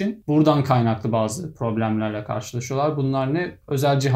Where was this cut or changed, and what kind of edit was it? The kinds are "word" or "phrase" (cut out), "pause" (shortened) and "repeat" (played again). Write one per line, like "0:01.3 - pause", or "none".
none